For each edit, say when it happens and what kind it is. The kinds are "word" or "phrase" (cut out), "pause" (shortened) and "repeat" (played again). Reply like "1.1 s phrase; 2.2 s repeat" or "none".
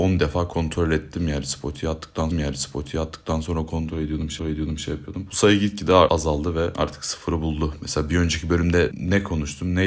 2.3 s repeat; 4.4 s repeat